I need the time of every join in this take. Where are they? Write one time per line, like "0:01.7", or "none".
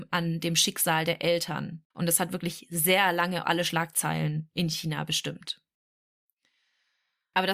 0:01.9
0:03.4